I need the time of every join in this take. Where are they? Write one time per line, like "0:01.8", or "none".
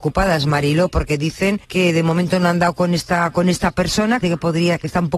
0:01.6
0:04.2